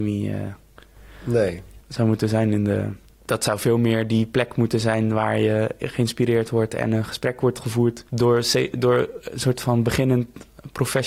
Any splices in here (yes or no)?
yes